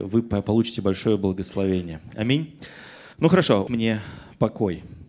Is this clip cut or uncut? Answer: cut